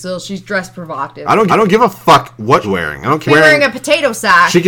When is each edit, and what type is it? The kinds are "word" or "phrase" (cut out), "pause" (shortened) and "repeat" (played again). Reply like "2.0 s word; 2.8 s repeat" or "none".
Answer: 1.5 s repeat; 2.6 s word; 3.3 s phrase